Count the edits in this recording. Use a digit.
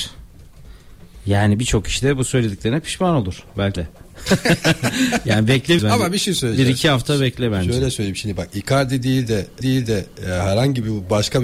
3